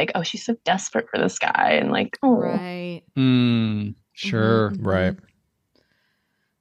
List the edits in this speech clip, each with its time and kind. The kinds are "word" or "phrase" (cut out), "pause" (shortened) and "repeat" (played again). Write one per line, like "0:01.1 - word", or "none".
none

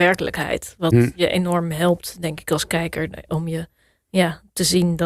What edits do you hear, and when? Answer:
none

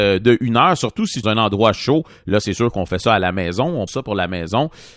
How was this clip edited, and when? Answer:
0:01.2 - phrase
0:03.9 - word

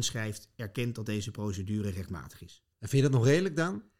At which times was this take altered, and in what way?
0:02.7 - pause

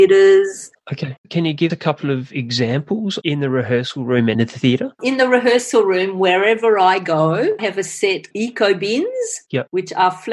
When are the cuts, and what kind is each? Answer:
0:01.7 - word
0:03.2 - word
0:04.3 - word
0:07.6 - word
0:08.3 - word

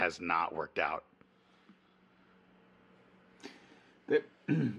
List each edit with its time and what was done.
none

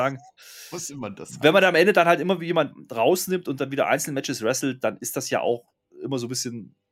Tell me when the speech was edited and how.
none

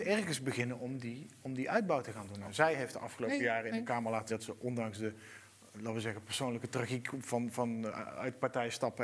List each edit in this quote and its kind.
0:04.3 - word

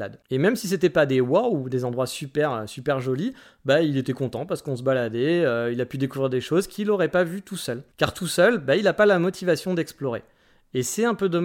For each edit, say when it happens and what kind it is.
0:07.9 - pause

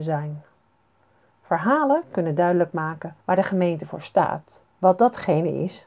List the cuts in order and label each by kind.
0:03.2 - pause
0:04.7 - pause

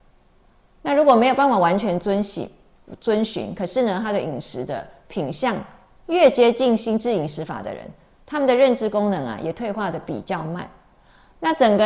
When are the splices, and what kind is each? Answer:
none

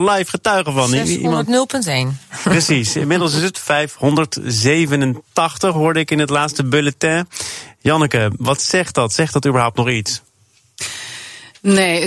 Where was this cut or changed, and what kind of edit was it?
none

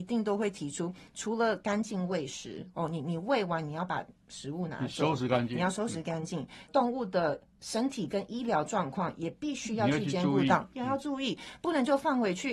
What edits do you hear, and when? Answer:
0:06.7 - phrase

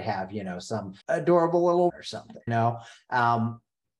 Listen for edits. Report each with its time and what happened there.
0:01.0 - pause
0:01.9 - phrase
0:02.5 - word

